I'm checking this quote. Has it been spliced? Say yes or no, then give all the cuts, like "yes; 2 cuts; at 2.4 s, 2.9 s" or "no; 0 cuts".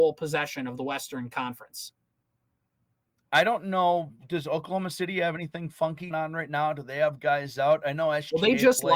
yes; 1 cut; at 6.1 s